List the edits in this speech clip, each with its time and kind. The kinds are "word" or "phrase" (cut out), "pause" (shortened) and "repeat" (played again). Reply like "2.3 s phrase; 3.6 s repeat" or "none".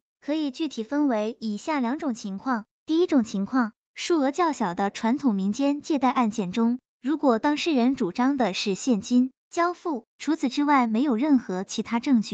9.4 s pause; 10.1 s pause